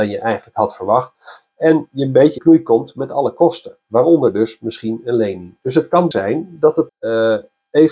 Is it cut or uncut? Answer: cut